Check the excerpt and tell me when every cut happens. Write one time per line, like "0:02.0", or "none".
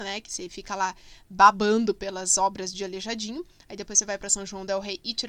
none